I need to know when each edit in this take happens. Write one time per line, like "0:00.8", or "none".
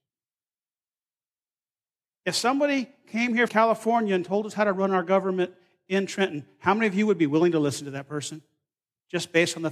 0:03.5